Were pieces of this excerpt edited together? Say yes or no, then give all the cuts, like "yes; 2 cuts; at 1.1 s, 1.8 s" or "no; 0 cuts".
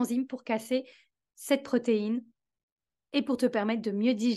no; 0 cuts